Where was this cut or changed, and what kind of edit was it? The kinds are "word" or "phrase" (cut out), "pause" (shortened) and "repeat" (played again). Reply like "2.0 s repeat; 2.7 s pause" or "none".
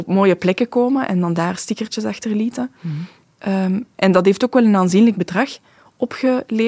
none